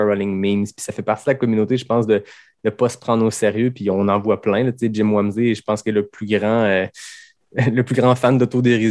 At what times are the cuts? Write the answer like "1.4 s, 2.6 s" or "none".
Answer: none